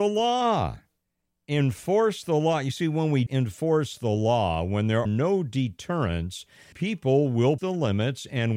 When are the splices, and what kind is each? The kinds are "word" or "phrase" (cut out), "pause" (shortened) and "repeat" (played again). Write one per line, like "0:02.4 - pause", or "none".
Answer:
0:03.3 - word
0:05.1 - word
0:06.7 - word
0:07.6 - word